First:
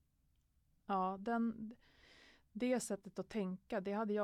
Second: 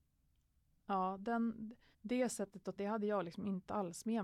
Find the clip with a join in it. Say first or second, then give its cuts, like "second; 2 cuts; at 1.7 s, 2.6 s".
second; 2 cuts; at 1.9 s, 2.8 s